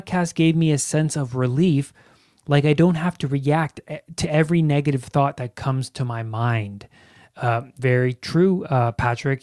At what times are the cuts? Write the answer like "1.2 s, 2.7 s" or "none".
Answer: none